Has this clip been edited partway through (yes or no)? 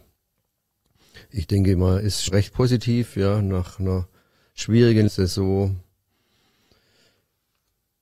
yes